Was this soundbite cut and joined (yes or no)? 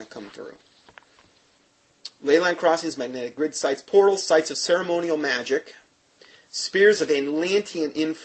no